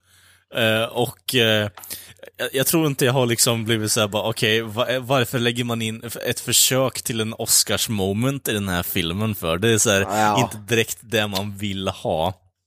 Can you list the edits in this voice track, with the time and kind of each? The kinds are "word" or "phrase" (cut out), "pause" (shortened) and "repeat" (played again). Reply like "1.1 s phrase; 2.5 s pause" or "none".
none